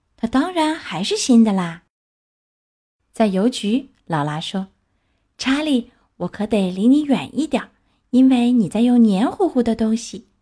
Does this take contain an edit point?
no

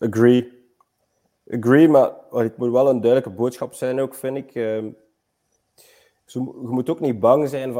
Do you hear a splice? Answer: no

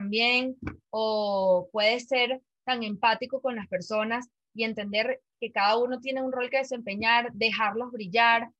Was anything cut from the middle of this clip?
no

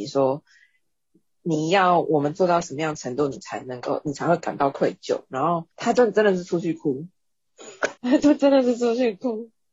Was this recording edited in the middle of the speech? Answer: yes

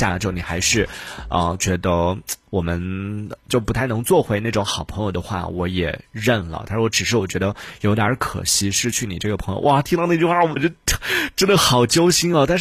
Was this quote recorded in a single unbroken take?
no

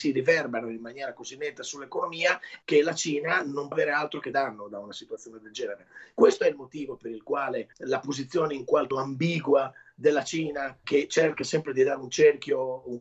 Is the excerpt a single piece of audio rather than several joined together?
no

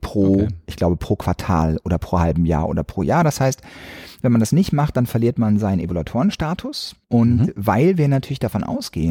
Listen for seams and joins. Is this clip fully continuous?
no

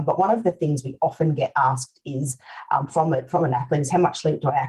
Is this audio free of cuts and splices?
yes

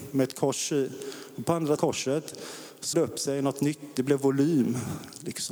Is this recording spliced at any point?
yes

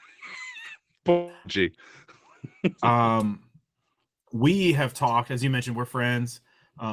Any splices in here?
no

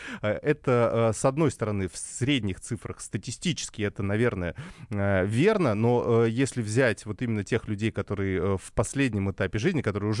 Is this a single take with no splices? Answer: yes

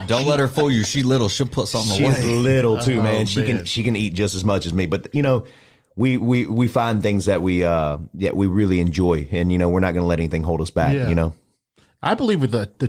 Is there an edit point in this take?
no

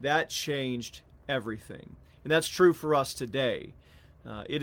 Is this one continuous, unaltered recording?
yes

